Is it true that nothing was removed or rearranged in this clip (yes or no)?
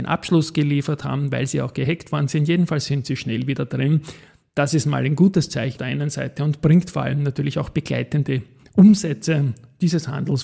no